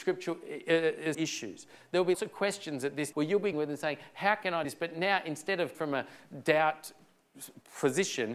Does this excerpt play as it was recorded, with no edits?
no; 6 cuts; at 1.1 s, 2.1 s, 3.1 s, 3.5 s, 4.6 s, 5.7 s

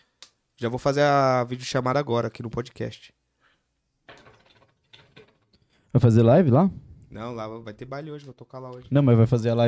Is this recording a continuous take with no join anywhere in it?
yes; 0 cuts

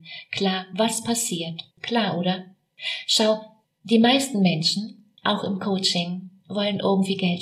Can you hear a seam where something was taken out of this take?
yes; 3 cuts; at 1.7 s, 3.7 s, 5.2 s

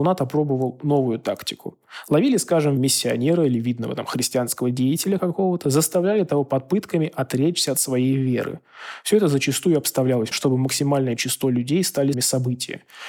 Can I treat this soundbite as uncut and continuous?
no; 3 cuts; at 2.8 s, 10.3 s, 12.1 s

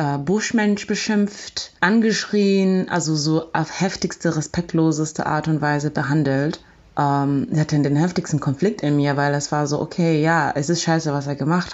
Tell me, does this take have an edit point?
yes; 1 cut; at 1.8 s

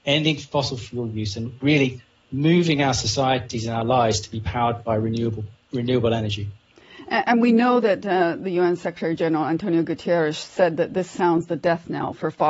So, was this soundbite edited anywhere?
no; 0 cuts

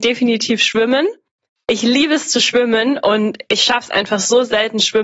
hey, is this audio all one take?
yes; 0 cuts

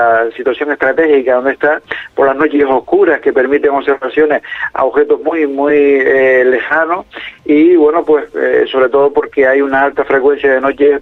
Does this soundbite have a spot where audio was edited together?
no; 0 cuts

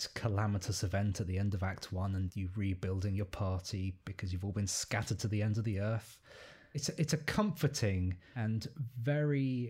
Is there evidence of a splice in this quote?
yes; 1 cut; at 2.3 s

